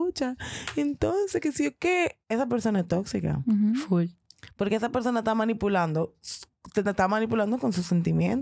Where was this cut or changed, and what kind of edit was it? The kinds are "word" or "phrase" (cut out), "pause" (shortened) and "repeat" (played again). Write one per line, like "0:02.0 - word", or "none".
0:02.2 - pause